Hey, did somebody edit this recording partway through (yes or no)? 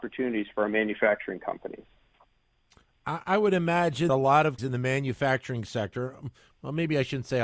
yes